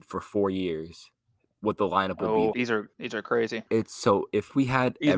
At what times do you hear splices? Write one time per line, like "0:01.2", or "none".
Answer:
0:02.5
0:02.9
0:03.7